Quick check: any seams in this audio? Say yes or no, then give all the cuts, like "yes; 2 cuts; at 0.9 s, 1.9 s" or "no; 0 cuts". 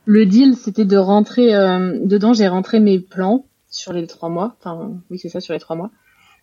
no; 0 cuts